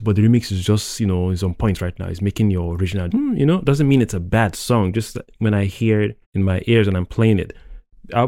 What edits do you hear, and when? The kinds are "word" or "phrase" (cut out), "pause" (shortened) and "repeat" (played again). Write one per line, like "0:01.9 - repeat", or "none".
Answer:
0:03.1 - word
0:06.2 - pause